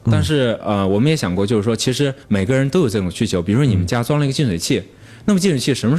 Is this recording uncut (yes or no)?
no